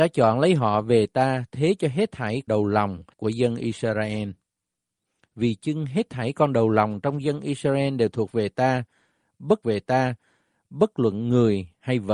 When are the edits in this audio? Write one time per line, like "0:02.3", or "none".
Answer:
0:02.5
0:03.1
0:09.6